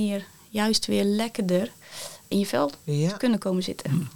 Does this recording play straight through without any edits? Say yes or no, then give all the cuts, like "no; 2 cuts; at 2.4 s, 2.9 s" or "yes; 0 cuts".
no; 1 cut; at 2.3 s